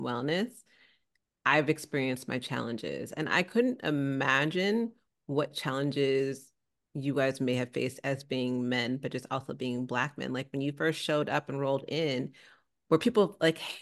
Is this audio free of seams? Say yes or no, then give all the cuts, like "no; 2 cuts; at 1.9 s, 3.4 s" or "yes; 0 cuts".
yes; 0 cuts